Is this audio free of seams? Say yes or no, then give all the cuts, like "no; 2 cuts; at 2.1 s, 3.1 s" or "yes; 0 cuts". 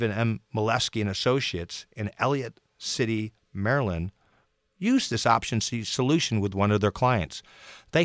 yes; 0 cuts